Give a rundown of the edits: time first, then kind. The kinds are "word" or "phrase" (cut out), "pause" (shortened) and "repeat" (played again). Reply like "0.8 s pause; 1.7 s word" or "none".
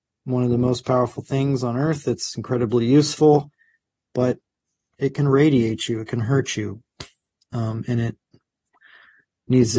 none